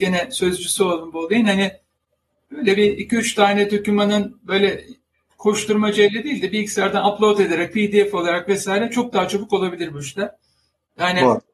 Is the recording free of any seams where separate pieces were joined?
yes; 0 cuts

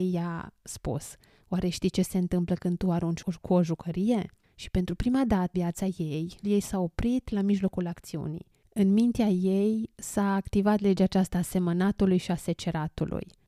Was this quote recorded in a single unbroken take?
no; 2 cuts; at 5.5 s, 6.4 s

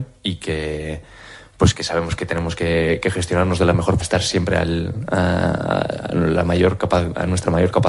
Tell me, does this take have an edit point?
yes; 1 cut; at 4.0 s

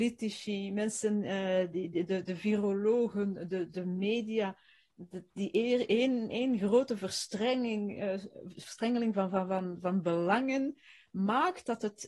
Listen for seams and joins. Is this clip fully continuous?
yes; 0 cuts

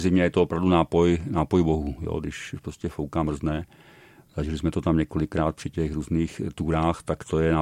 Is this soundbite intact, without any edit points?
yes; 0 cuts

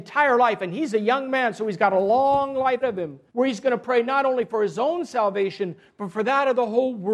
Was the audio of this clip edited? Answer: yes; 2 cuts; at 2.8 s, 3.3 s

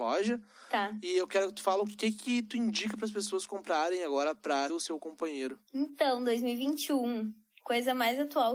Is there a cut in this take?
yes; 2 cuts; at 4.7 s, 5.7 s

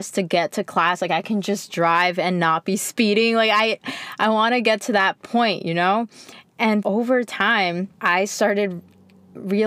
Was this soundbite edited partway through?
yes; 2 cuts; at 6.8 s, 7.9 s

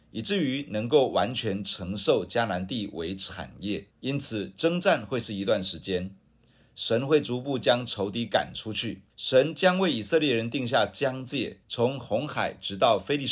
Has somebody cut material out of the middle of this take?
yes; 3 cuts; at 3.9 s, 9.1 s, 11.6 s

